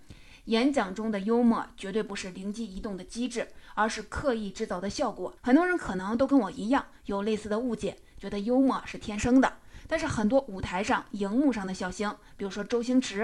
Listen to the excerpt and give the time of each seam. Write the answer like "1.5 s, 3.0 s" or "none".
5.4 s